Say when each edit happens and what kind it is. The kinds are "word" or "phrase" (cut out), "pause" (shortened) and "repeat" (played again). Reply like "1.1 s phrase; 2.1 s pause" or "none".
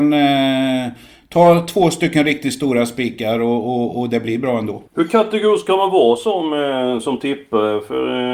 4.9 s pause